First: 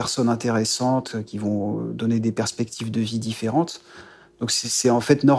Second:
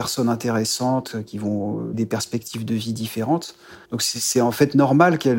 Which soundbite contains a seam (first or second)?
second